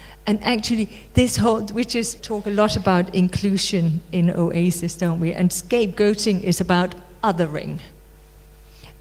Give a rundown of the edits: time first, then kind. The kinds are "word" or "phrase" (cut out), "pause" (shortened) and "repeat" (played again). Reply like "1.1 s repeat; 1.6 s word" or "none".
2.2 s word